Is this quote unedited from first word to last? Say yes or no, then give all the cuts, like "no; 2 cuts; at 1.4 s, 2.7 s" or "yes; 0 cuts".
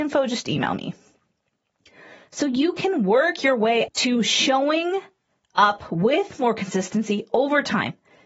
no; 1 cut; at 3.9 s